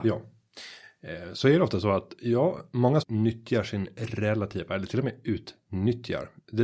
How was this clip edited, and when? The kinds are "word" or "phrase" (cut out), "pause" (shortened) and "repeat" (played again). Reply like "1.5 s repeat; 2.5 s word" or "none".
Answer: 3.0 s word